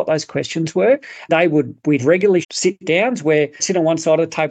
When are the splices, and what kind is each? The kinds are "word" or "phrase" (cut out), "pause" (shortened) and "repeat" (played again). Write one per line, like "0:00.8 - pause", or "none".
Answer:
0:01.3 - word
0:02.0 - word
0:02.4 - word
0:03.6 - word